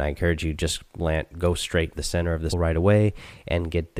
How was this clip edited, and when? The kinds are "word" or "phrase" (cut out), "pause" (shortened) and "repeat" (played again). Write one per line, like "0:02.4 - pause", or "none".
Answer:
0:01.9 - word
0:02.5 - word